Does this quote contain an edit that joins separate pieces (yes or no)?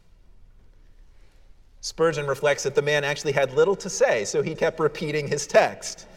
yes